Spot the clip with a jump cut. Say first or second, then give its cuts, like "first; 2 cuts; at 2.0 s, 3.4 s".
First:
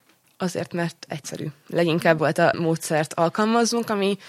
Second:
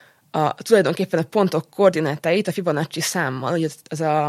first; 2 cuts; at 2.2 s, 2.5 s